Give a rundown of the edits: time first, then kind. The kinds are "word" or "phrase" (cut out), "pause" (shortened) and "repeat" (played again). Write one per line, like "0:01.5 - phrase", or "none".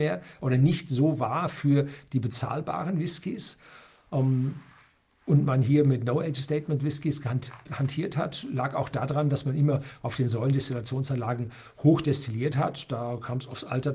none